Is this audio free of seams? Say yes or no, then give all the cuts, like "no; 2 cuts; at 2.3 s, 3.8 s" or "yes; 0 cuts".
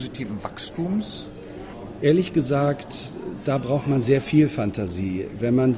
yes; 0 cuts